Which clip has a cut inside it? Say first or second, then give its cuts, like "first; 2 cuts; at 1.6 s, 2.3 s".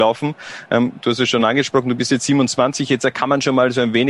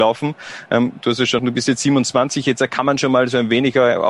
second; 1 cut; at 1.4 s